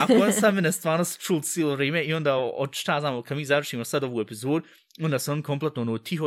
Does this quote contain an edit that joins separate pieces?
no; 0 cuts

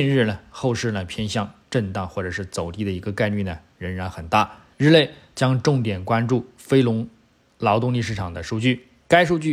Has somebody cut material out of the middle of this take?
yes; 1 cut; at 4.7 s

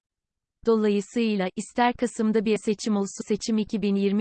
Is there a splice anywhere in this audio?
yes; 2 cuts; at 2.6 s, 3.2 s

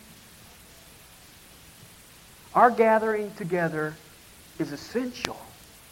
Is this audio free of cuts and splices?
yes; 0 cuts

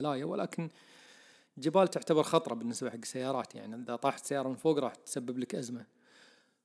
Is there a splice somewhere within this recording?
no; 0 cuts

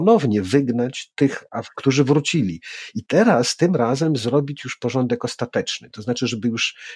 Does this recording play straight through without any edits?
no; 1 cut; at 1.7 s

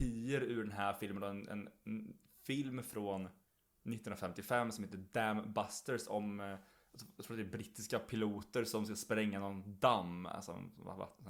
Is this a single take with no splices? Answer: yes; 0 cuts

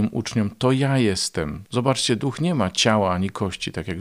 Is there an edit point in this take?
no; 0 cuts

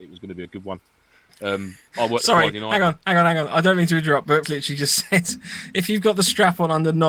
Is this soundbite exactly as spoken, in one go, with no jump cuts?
no; 1 cut; at 4.4 s

